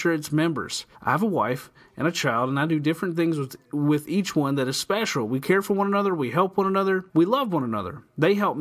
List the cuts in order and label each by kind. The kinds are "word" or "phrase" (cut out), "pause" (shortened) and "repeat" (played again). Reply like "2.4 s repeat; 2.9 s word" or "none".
0.9 s pause; 7.1 s pause

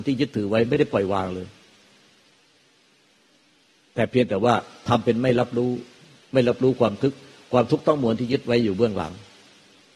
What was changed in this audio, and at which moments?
none

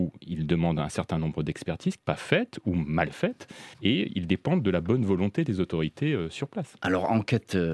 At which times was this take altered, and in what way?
2.0 s phrase; 3.7 s pause

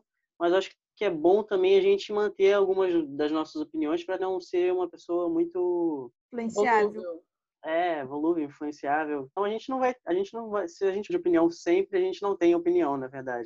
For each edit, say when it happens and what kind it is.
4.2 s word; 6.2 s pause; 9.4 s word; 11.1 s word

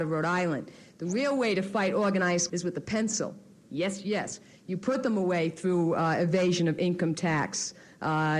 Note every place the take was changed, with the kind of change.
2.5 s word

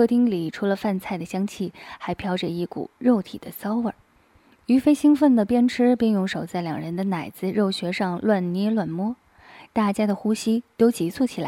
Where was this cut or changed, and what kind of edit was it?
none

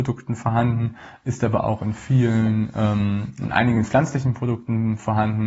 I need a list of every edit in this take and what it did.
none

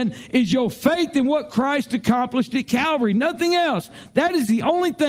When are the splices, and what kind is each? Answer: none

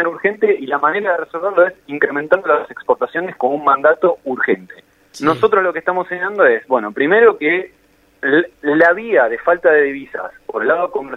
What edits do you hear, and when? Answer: 4.9 s pause; 8.5 s pause

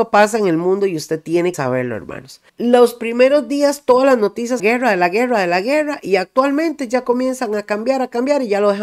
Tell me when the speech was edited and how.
1.5 s word; 2.5 s pause; 4.6 s phrase

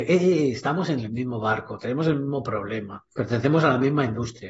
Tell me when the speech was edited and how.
3.1 s pause

